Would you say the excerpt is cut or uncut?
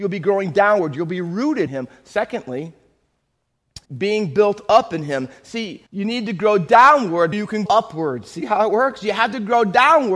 cut